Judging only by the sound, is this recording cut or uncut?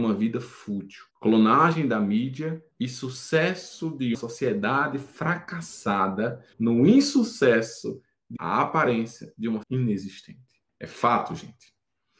cut